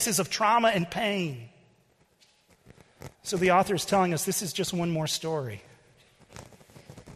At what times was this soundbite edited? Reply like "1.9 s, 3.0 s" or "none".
3.1 s